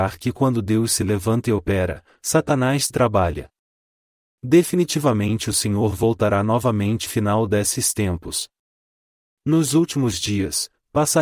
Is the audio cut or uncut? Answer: cut